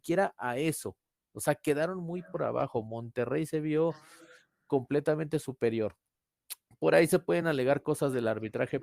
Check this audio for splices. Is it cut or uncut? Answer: uncut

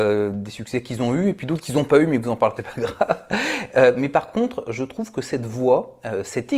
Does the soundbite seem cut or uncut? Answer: cut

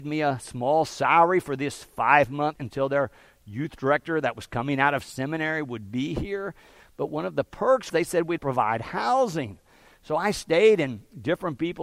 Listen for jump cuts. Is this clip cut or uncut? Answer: cut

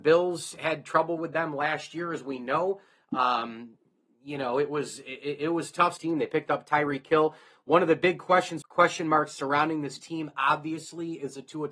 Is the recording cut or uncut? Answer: cut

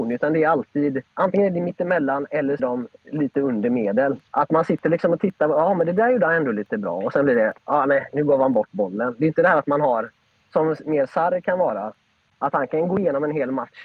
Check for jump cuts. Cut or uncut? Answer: cut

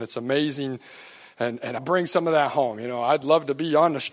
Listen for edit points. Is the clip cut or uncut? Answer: cut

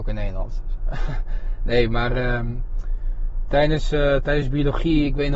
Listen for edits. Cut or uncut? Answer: uncut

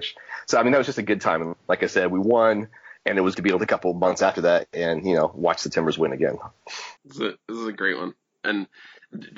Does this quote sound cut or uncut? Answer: cut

